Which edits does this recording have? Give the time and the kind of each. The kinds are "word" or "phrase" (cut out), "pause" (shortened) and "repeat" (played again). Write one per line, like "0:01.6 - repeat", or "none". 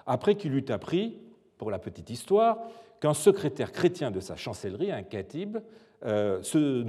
none